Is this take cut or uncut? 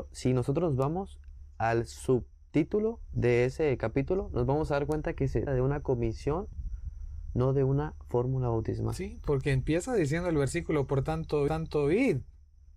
cut